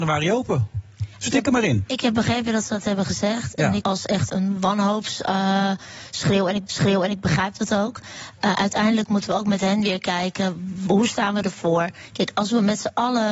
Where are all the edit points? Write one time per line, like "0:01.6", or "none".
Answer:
0:01.1
0:03.8
0:04.3
0:06.7